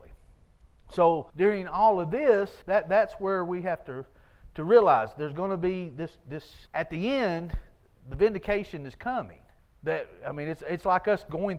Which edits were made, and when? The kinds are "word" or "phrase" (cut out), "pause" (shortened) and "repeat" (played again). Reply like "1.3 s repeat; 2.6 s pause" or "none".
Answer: 1.3 s pause; 2.6 s pause; 6.7 s pause; 7.8 s pause; 9.6 s pause